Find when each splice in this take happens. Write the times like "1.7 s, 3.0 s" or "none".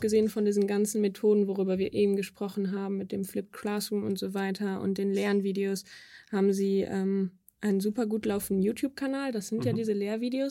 none